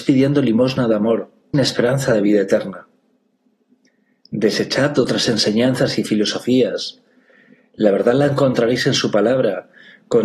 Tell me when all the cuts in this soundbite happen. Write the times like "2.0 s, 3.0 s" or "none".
1.5 s